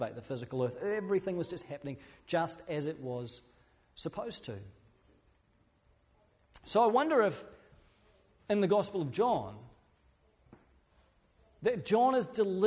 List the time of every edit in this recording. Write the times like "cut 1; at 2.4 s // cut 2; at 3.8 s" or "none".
none